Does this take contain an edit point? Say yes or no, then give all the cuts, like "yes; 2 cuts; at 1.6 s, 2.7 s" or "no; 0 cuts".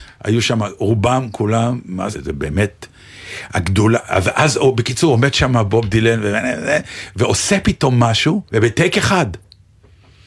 yes; 2 cuts; at 2.1 s, 8.5 s